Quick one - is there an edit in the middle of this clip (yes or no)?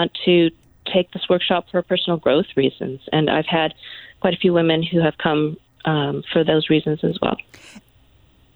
yes